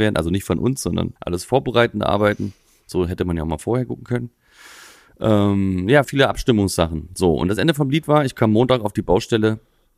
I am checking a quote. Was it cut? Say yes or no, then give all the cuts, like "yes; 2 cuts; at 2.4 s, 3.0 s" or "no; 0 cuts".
yes; 2 cuts; at 1.2 s, 6.0 s